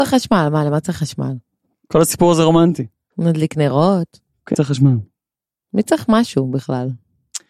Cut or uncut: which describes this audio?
cut